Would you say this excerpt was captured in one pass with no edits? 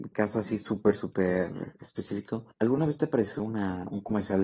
no; 1 cut; at 2.5 s

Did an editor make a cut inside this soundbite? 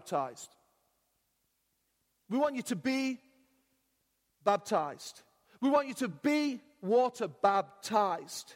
no; 0 cuts

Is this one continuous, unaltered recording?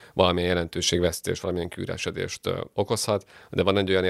yes; 0 cuts

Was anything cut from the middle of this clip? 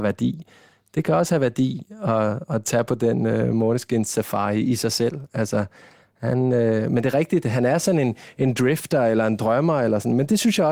no; 0 cuts

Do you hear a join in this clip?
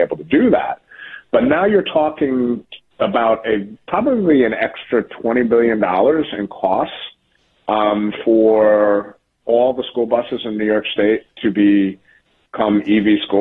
no; 0 cuts

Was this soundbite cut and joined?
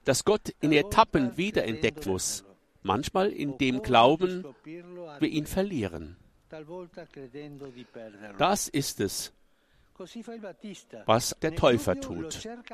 yes; 3 cuts; at 2.1 s, 5.2 s, 11.4 s

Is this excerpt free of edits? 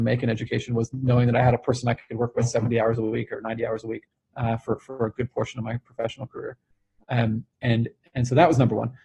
no; 1 cut; at 4.1 s

